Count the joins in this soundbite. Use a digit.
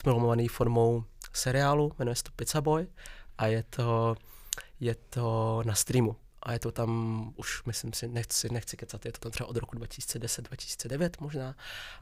0